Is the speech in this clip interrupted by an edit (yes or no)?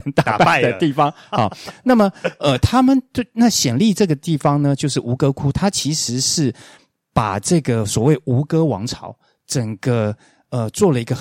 no